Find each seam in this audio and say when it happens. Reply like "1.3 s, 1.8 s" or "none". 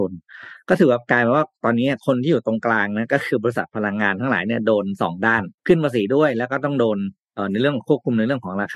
5.6 s